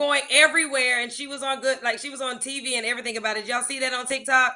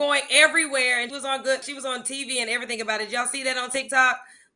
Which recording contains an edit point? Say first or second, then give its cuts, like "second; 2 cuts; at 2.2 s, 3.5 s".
second; 2 cuts; at 1.1 s, 1.6 s